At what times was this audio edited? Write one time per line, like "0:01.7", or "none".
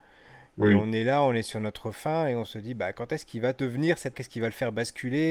0:04.1